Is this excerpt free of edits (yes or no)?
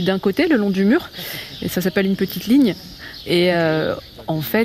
yes